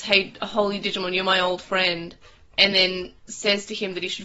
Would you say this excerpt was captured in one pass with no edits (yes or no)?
yes